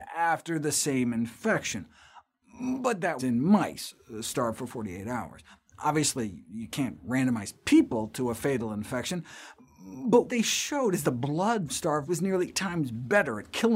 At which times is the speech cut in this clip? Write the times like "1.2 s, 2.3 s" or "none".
3.2 s, 10.3 s, 11.0 s, 11.7 s, 12.1 s, 12.5 s